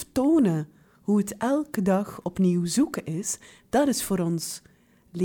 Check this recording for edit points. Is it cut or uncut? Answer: uncut